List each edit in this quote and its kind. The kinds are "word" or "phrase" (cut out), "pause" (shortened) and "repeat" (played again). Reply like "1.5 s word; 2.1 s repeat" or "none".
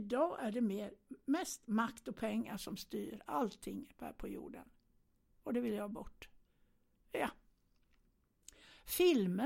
none